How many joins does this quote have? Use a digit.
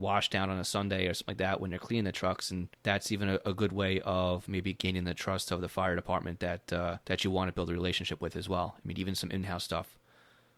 2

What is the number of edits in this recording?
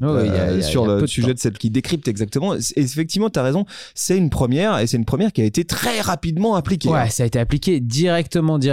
1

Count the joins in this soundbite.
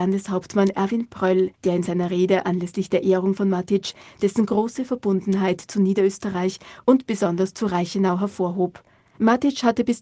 2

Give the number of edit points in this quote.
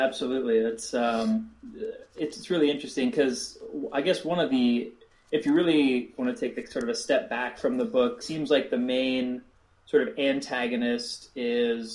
1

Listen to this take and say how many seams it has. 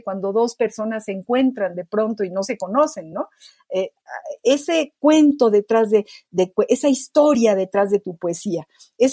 0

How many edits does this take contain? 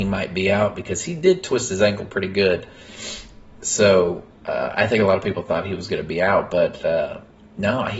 0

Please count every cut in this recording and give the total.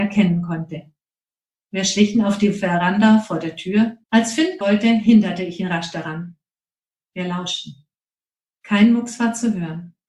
2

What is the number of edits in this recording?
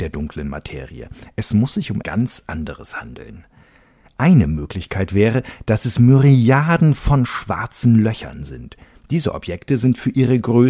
1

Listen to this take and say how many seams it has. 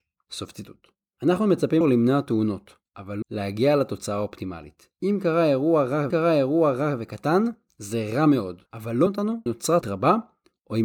9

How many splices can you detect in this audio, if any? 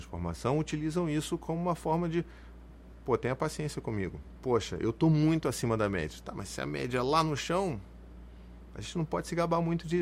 0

